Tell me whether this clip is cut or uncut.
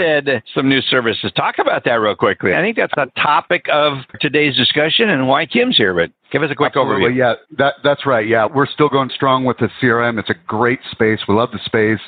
cut